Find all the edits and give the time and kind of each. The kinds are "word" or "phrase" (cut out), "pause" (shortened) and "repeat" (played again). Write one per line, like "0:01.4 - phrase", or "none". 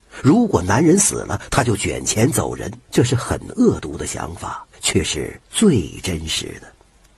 0:02.8 - pause
0:04.7 - pause
0:05.4 - pause